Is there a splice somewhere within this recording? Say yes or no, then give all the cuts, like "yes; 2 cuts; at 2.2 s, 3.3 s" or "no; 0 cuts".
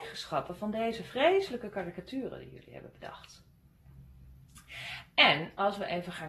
no; 0 cuts